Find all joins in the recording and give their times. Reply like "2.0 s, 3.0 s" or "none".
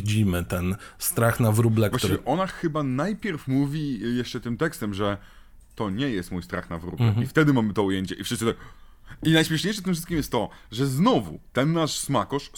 none